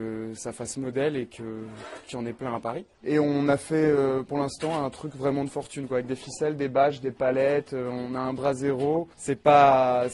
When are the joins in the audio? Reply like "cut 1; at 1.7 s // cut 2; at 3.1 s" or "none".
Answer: cut 1; at 9.1 s